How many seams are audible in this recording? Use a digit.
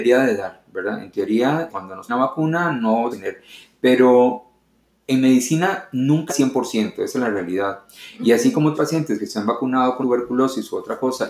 6